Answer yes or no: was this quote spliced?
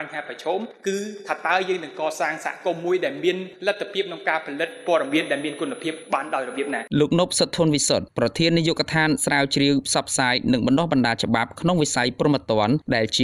yes